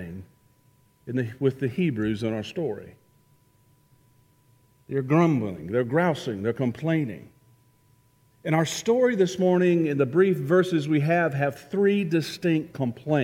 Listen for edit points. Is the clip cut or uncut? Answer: uncut